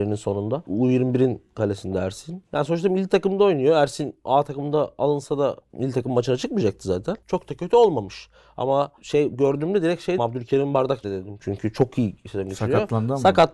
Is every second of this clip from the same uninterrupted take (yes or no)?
no